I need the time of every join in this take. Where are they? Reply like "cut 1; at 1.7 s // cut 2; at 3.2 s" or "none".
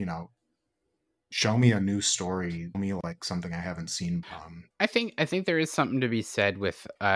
cut 1; at 2.7 s // cut 2; at 4.2 s // cut 3; at 4.7 s